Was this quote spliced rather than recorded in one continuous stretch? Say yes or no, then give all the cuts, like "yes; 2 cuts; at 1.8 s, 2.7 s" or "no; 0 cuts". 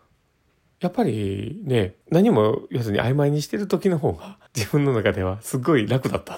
yes; 2 cuts; at 2.0 s, 4.5 s